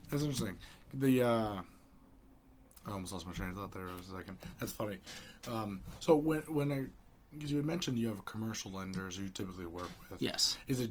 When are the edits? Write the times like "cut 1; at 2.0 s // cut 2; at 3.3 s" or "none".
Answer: none